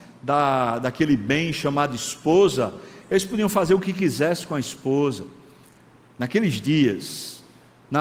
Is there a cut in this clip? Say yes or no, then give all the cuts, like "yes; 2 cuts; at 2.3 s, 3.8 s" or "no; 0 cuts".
no; 0 cuts